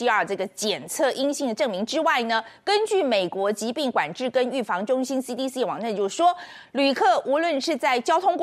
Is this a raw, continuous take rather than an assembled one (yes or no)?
yes